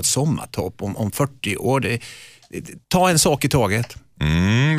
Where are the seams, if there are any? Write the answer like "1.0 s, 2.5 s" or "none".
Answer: 2.8 s